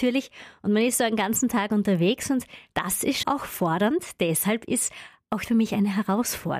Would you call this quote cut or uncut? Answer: cut